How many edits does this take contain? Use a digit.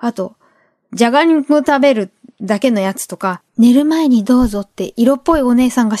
1